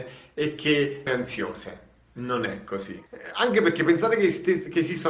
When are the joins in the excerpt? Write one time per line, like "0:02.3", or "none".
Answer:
0:01.1
0:03.1